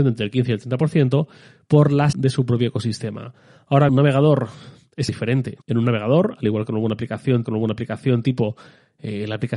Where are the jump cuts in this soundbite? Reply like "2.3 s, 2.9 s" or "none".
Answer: 2.1 s, 3.9 s, 5.1 s, 5.6 s, 7.4 s